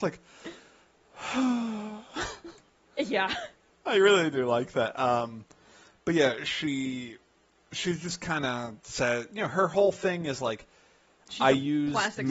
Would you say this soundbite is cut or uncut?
cut